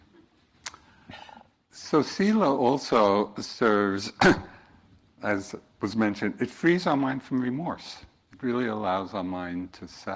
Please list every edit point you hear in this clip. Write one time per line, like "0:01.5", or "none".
none